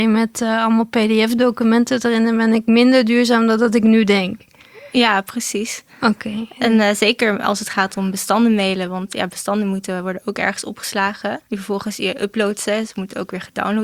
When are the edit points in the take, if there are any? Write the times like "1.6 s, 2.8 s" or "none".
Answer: 11.4 s